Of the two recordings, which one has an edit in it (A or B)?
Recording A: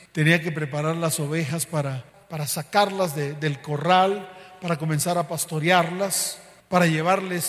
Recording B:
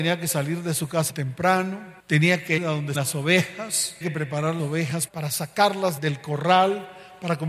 B